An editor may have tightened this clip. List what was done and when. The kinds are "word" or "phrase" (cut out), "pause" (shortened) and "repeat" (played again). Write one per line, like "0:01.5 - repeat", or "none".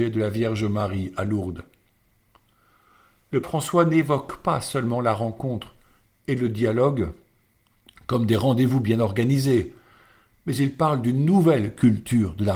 0:03.4 - word